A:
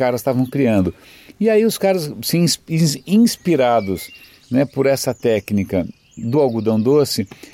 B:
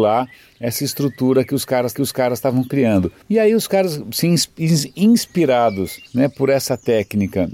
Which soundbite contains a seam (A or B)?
B